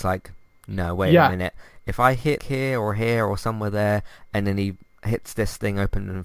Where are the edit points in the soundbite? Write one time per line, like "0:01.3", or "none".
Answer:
0:02.4